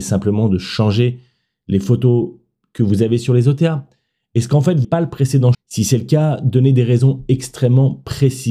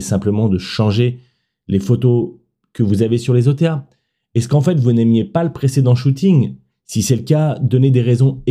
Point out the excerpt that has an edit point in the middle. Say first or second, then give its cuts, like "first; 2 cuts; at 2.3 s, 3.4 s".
first; 2 cuts; at 4.8 s, 5.5 s